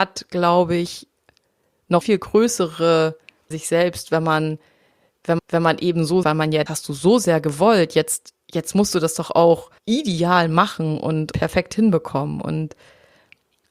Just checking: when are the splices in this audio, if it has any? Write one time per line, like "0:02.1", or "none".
0:02.0
0:03.5
0:05.4
0:06.2
0:06.7
0:08.4
0:09.8
0:11.3